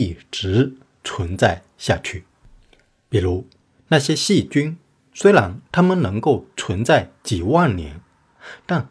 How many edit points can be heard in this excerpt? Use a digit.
0